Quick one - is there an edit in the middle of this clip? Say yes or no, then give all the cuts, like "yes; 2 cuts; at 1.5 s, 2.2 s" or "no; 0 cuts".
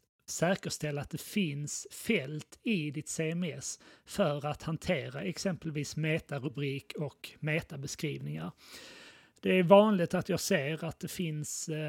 no; 0 cuts